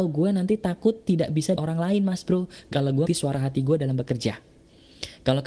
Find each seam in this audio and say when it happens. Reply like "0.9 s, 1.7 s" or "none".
1.6 s, 3.1 s